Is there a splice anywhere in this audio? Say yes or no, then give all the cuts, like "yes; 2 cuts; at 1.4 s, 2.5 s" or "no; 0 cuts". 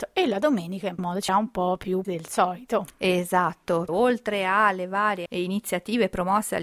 yes; 5 cuts; at 1.0 s, 1.3 s, 2.0 s, 3.9 s, 5.3 s